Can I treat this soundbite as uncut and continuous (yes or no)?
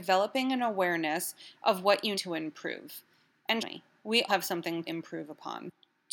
no